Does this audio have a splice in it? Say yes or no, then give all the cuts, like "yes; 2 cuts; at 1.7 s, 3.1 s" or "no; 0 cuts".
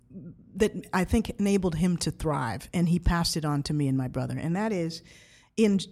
no; 0 cuts